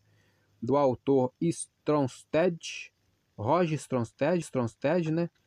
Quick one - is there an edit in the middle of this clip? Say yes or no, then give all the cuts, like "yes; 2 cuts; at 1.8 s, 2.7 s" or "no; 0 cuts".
yes; 1 cut; at 4.4 s